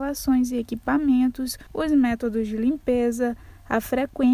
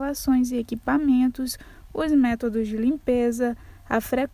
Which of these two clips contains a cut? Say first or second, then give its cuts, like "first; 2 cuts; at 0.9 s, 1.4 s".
first; 1 cut; at 1.7 s